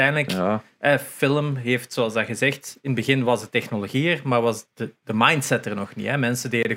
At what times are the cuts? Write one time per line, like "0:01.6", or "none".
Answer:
none